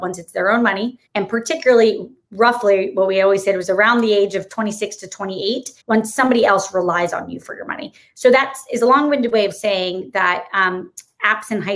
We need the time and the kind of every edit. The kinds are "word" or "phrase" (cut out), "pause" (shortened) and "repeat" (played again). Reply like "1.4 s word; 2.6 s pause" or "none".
1.1 s pause; 5.8 s pause